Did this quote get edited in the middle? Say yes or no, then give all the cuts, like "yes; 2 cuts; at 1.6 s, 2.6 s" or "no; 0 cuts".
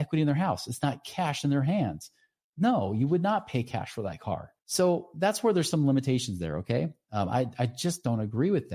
no; 0 cuts